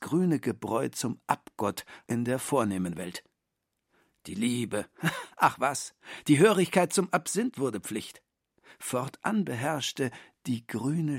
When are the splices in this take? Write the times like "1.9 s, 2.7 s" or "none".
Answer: 2.1 s